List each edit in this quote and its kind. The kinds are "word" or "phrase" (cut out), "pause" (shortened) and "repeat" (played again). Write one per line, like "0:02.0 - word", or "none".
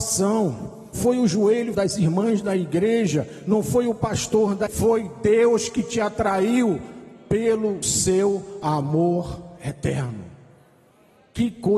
0:00.9 - word
0:01.7 - word
0:04.7 - word
0:07.8 - word